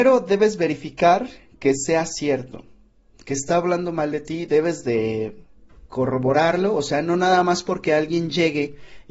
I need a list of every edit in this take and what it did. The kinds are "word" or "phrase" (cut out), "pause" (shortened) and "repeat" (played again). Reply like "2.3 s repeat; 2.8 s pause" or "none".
none